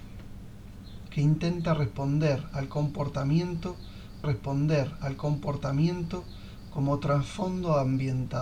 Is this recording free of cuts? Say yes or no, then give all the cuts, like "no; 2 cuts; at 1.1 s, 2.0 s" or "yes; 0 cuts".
no; 2 cuts; at 1.1 s, 4.2 s